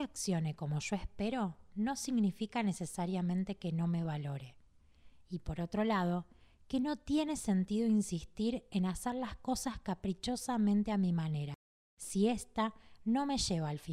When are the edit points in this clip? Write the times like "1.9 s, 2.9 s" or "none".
none